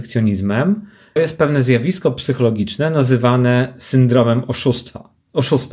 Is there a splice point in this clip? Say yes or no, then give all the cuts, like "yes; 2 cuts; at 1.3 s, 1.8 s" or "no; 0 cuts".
yes; 1 cut; at 1.2 s